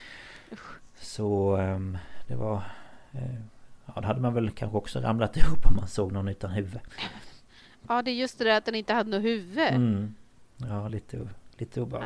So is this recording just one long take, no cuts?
yes; 0 cuts

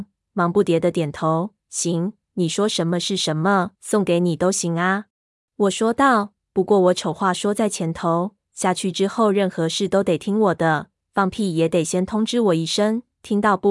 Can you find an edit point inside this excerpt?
yes; 2 cuts; at 3.8 s, 5.1 s

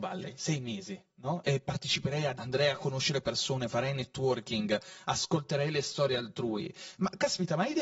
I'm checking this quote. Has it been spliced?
yes; 1 cut; at 2.4 s

